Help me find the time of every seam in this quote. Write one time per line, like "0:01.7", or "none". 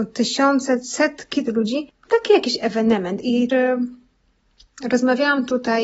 0:01.5
0:02.1
0:03.5